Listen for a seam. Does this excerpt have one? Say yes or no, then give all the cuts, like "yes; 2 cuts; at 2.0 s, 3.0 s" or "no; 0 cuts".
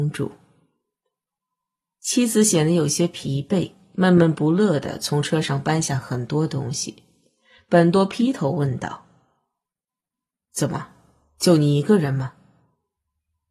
no; 0 cuts